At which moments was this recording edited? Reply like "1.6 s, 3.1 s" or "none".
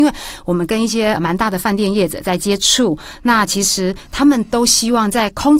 1.2 s